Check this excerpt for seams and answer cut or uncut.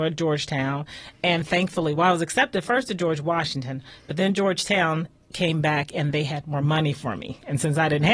uncut